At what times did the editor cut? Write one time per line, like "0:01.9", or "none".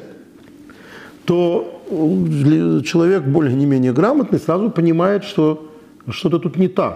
none

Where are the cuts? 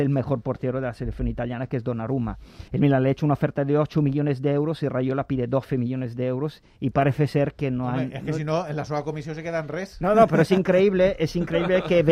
0:02.7

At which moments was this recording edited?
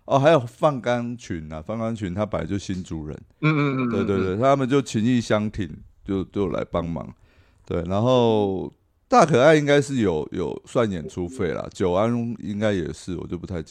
0:03.3

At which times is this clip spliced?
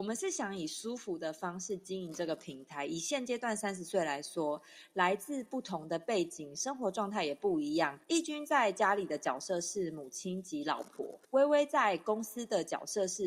0:08.0
0:11.2

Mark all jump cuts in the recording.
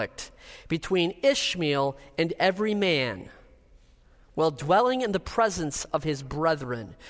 none

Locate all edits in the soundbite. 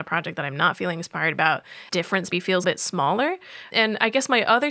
0:01.9
0:02.3
0:02.6

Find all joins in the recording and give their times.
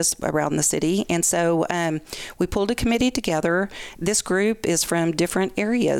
none

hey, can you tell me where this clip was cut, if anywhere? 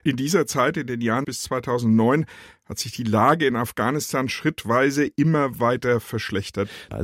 none

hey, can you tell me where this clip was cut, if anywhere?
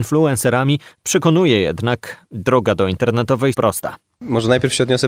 0:03.5

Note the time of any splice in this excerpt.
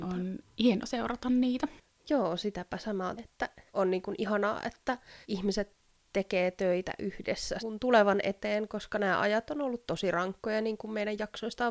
0:01.9
0:03.2
0:03.7
0:05.2
0:07.6

